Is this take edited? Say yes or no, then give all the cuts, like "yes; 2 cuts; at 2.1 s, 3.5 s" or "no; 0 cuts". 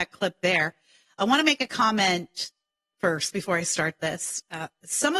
no; 0 cuts